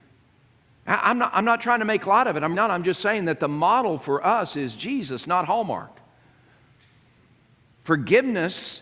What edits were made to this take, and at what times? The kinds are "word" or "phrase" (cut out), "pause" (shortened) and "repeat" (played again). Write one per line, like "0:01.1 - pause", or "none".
0:02.5 - word